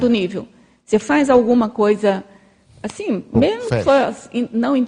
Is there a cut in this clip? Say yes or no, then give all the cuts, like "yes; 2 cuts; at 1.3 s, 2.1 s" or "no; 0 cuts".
no; 0 cuts